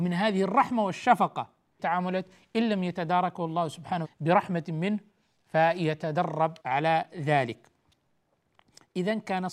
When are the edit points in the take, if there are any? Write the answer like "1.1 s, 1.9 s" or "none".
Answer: 1.8 s, 4.0 s, 6.6 s